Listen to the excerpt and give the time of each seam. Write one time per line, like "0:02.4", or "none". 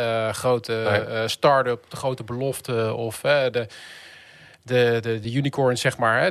none